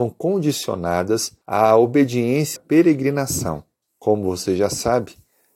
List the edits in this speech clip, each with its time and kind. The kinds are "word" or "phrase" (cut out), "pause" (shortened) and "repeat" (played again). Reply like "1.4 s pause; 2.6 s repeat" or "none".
1.4 s pause; 2.6 s phrase; 3.8 s pause

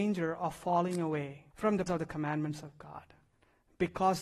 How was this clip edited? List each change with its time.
1.5 s pause; 1.9 s phrase

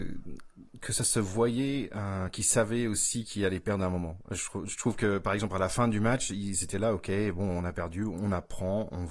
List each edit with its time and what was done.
none

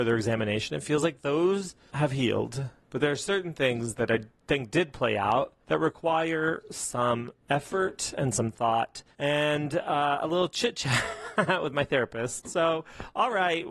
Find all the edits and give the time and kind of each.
none

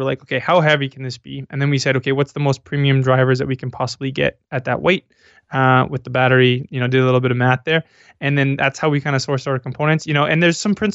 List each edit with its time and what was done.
none

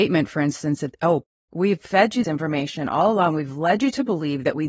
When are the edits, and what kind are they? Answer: 2.2 s word

